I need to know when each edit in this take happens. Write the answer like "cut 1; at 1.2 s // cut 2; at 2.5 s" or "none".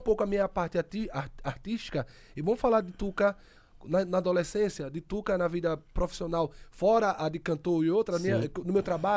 none